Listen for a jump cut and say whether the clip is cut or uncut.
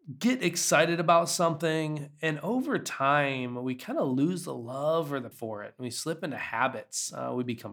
cut